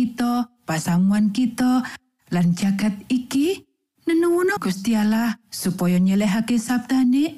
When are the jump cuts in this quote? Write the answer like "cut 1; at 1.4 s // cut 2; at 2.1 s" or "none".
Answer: cut 1; at 4.6 s